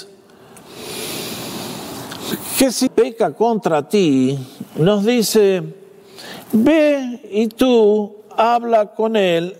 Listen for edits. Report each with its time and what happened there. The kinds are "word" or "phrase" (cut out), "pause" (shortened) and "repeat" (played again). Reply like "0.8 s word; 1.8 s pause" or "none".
2.9 s word